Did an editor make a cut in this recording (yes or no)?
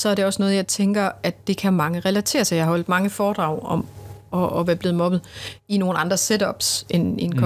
no